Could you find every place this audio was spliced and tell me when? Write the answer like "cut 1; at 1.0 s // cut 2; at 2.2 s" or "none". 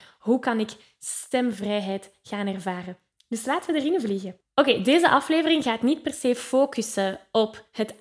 none